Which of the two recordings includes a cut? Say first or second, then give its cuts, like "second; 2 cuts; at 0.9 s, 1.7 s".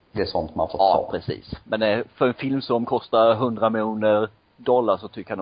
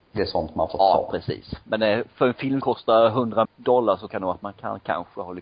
second; 3 cuts; at 2.6 s, 3.4 s, 4.1 s